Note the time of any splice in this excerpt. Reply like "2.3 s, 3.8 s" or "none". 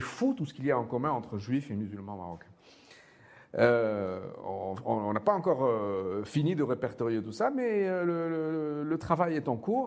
none